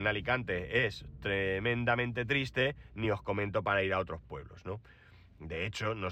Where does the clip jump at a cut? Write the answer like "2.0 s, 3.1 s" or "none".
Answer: none